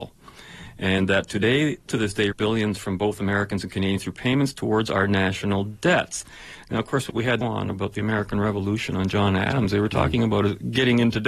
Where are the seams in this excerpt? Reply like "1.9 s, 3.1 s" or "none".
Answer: 1.9 s, 2.3 s, 7.1 s, 7.4 s